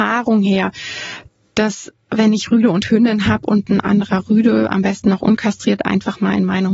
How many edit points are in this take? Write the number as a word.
zero